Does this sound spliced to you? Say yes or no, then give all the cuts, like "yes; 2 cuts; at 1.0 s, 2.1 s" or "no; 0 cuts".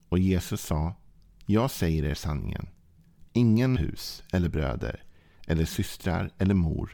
yes; 1 cut; at 3.8 s